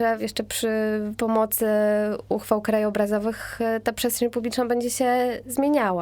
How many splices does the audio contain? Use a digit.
0